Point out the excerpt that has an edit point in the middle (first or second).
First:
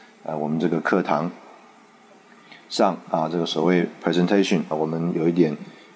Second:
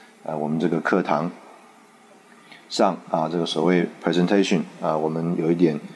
first